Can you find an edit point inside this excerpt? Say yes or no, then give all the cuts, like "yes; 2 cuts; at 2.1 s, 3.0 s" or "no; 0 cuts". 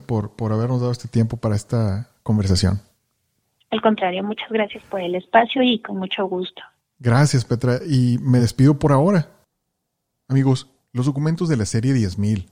no; 0 cuts